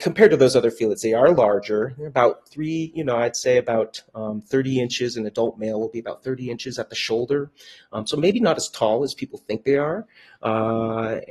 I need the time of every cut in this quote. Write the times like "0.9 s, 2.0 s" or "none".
none